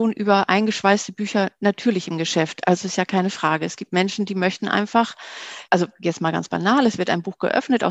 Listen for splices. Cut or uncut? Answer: cut